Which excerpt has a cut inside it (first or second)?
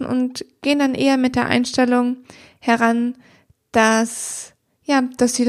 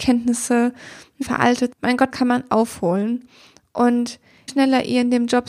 second